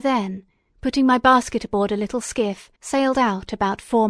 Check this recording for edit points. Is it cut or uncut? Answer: cut